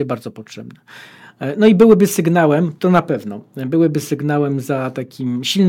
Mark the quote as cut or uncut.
uncut